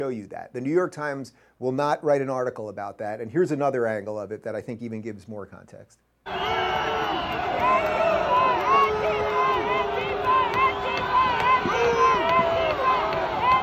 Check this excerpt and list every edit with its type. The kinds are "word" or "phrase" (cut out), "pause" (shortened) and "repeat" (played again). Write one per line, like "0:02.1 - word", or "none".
none